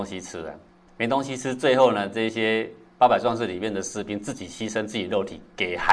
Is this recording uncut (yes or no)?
yes